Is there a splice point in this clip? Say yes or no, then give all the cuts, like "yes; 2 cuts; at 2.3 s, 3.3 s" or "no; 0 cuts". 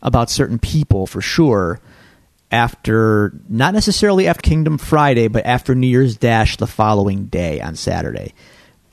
yes; 1 cut; at 4.4 s